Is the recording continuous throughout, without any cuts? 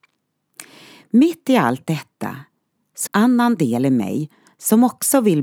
no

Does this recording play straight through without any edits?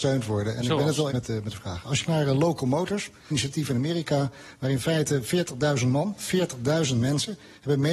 no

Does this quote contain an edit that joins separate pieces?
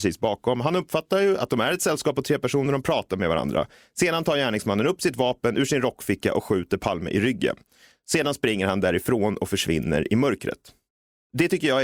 no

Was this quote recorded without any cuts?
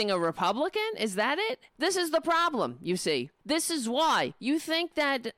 no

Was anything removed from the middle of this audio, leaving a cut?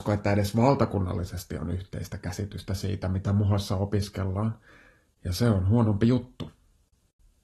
no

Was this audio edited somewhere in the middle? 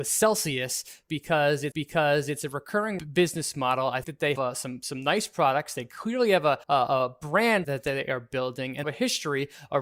yes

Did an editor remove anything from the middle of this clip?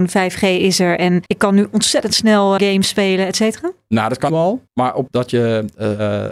yes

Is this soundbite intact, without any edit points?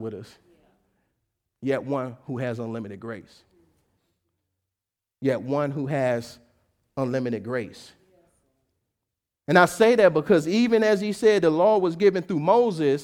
yes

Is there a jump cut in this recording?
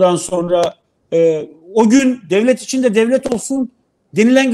no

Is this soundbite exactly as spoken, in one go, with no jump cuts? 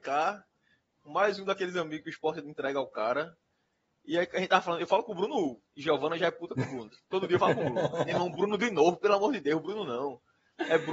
yes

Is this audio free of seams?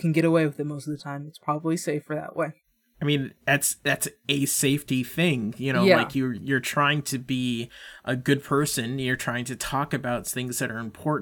yes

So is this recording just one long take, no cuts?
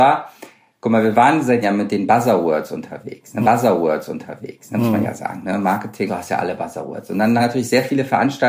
no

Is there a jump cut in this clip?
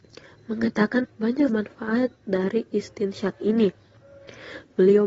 yes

